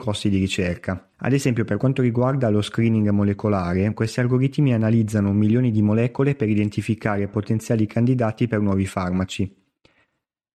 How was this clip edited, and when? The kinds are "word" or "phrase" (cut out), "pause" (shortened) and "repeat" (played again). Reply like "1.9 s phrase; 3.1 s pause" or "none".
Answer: 1.1 s pause